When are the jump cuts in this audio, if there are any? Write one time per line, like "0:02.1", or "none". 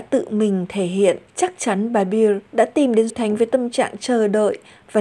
0:01.3
0:02.5
0:03.1